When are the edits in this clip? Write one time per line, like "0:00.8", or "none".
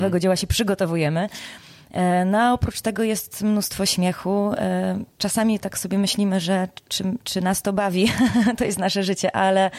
0:05.1
0:07.2